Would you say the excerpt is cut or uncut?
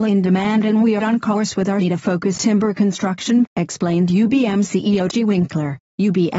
cut